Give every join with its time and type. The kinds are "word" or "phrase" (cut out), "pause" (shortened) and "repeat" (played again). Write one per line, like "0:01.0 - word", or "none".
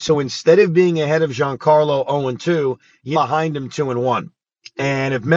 0:03.1 - word